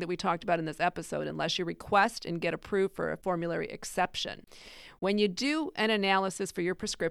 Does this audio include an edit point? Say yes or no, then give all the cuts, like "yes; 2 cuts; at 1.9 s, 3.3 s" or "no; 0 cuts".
no; 0 cuts